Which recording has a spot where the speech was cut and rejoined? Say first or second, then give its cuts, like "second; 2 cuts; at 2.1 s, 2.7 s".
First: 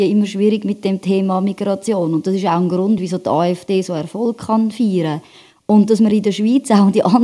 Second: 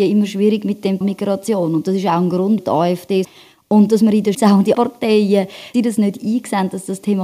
second; 6 cuts; at 1.0 s, 2.6 s, 3.2 s, 4.3 s, 4.7 s, 5.7 s